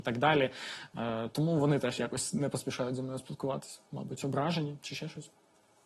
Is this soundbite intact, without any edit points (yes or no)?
yes